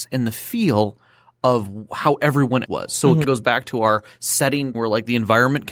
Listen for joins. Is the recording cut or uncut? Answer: cut